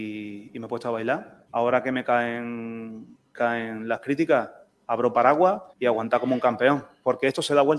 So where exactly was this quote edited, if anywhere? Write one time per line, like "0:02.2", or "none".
0:01.5
0:03.3
0:05.7